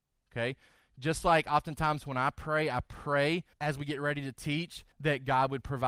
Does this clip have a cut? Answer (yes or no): yes